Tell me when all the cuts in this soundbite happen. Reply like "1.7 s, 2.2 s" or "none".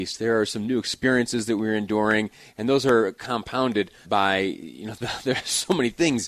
4.0 s, 5.0 s